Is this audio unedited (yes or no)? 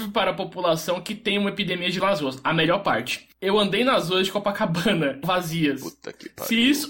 no